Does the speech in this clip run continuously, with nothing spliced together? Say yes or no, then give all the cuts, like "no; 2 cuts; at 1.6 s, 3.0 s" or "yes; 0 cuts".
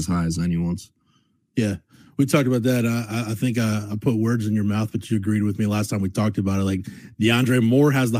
yes; 0 cuts